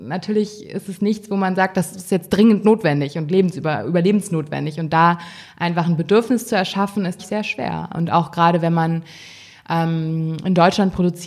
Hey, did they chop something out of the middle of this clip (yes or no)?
yes